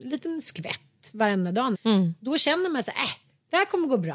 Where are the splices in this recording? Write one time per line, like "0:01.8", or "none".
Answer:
0:01.7